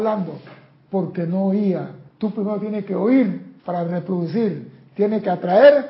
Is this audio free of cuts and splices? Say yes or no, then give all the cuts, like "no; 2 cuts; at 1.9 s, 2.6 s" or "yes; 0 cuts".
no; 2 cuts; at 2.1 s, 3.6 s